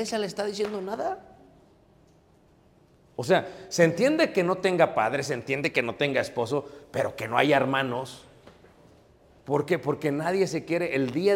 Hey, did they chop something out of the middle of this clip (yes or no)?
no